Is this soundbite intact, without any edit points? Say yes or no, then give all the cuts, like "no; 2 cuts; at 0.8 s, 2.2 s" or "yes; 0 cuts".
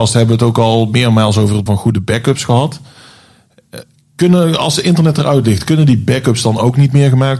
no; 1 cut; at 1.7 s